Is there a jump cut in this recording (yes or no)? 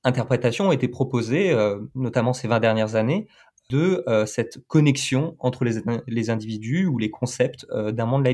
no